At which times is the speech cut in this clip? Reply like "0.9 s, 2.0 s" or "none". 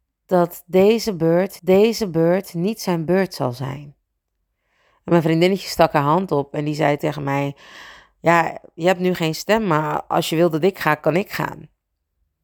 1.6 s, 7.0 s